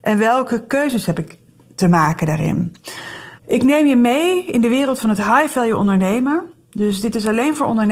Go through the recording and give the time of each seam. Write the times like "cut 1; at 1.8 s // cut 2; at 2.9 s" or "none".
cut 1; at 3.4 s